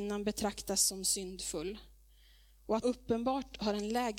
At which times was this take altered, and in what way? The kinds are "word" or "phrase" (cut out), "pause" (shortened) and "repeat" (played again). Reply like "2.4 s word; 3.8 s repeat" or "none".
2.8 s word